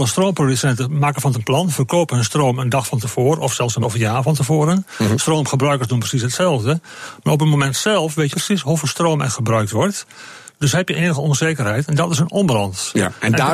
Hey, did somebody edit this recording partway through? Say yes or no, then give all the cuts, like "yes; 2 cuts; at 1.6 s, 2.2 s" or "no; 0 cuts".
yes; 3 cuts; at 1.3 s, 3.8 s, 8.3 s